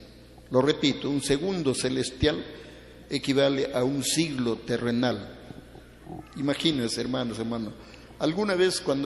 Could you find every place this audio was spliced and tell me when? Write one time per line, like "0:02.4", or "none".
none